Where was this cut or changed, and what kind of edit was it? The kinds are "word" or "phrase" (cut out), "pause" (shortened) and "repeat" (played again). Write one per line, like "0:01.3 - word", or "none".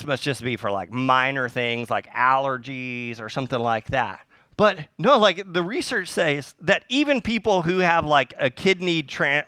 none